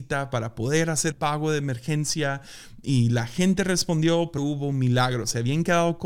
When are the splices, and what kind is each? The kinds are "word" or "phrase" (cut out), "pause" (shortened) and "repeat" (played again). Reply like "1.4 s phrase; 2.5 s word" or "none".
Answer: 1.1 s word; 4.4 s word

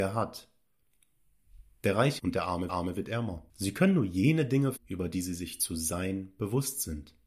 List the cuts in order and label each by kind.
2.2 s phrase; 2.7 s repeat; 3.5 s pause; 4.8 s word

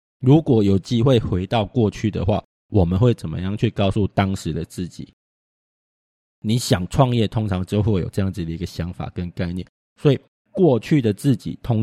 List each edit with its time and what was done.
none

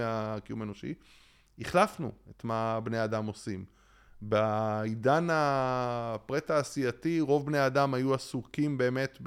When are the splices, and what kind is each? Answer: none

